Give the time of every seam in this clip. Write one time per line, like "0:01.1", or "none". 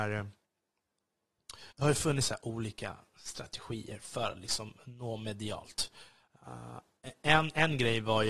0:01.7